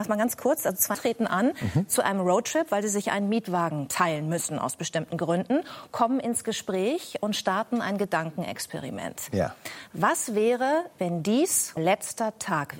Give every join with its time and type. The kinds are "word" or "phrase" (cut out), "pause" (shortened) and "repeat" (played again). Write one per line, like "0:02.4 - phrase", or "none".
0:00.9 - word
0:11.8 - word